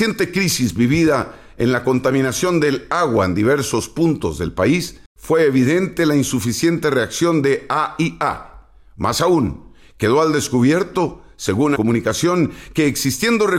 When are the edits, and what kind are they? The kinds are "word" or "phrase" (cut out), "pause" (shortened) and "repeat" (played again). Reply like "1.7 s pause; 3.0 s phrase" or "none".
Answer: 5.1 s pause; 11.8 s phrase